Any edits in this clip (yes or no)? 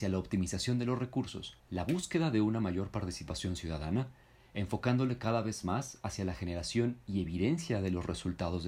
yes